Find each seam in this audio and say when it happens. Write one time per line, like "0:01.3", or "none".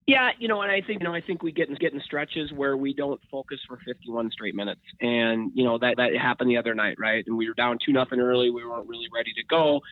0:01.0
0:01.8
0:05.9

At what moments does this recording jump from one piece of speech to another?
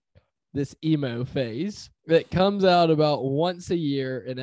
0:02.0

